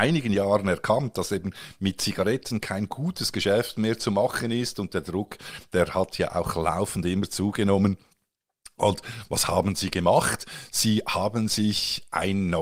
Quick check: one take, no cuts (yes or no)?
yes